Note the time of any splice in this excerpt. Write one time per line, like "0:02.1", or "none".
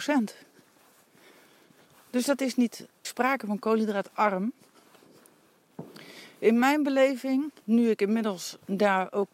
0:03.0
0:07.6